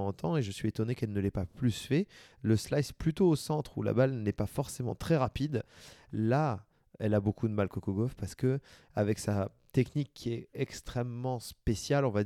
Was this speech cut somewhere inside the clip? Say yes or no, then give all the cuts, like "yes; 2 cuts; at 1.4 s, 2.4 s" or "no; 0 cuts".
no; 0 cuts